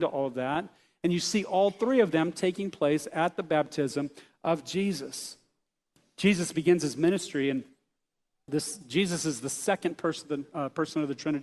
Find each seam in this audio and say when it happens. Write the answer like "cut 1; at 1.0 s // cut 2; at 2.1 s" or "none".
none

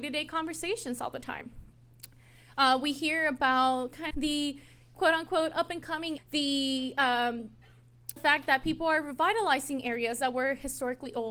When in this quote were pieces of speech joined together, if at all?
cut 1; at 4.1 s // cut 2; at 6.2 s // cut 3; at 8.2 s

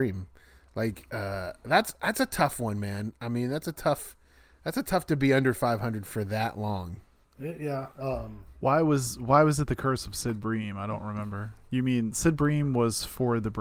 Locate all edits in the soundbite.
cut 1; at 7.9 s

